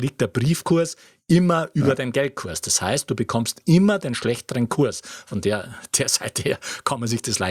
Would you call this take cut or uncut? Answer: uncut